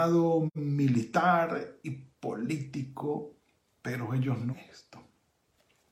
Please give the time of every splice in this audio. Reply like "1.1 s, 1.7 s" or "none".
1.8 s, 4.5 s